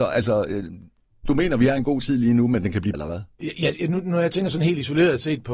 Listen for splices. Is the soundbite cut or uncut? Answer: cut